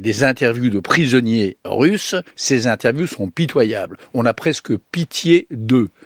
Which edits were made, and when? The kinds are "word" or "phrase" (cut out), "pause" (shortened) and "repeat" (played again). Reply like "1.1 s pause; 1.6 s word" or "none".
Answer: 2.3 s pause